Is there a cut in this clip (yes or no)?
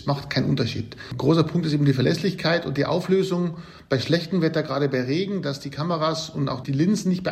no